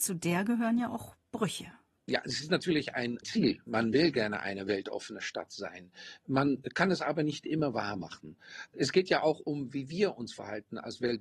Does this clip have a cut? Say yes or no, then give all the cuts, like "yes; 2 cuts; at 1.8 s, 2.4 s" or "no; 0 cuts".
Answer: no; 0 cuts